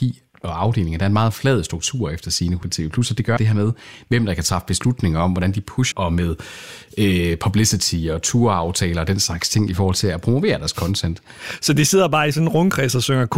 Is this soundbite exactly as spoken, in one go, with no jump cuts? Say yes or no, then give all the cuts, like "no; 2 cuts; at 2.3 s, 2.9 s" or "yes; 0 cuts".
no; 3 cuts; at 2.6 s, 3.4 s, 5.9 s